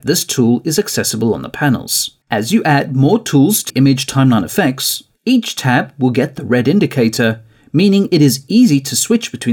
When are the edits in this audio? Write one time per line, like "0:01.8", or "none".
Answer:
0:02.2
0:03.7
0:05.1